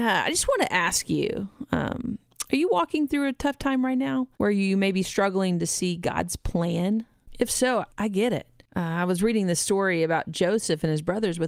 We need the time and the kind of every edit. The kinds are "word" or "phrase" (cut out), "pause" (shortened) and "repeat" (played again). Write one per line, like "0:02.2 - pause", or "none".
0:04.3 - pause
0:07.9 - pause